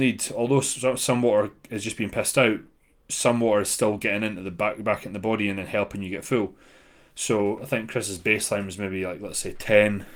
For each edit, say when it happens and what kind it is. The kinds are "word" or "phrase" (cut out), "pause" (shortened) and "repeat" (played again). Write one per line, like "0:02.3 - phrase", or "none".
none